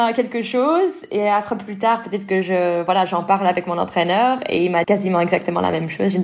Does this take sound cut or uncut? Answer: cut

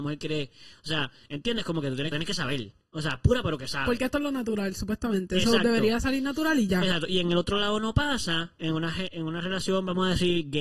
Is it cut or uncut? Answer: cut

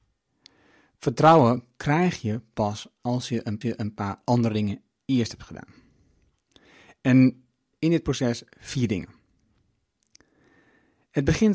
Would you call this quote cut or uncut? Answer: cut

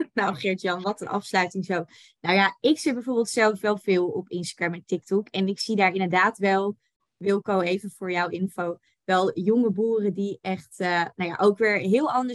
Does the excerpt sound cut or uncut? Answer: uncut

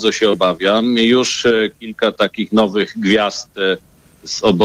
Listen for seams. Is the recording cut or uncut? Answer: uncut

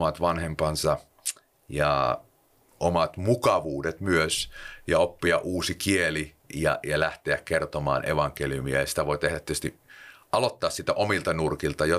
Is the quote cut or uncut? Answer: cut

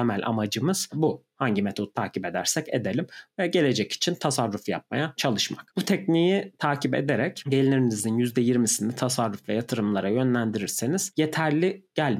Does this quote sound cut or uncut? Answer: uncut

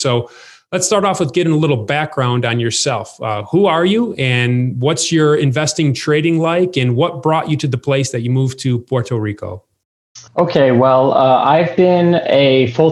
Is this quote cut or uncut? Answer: cut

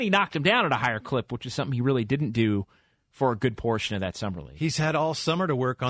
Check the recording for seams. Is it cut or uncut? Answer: uncut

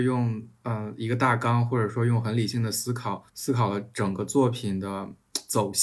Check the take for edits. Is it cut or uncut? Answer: cut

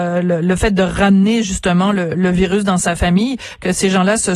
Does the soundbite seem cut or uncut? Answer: uncut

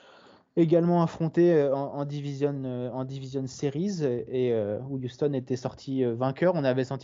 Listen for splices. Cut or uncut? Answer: uncut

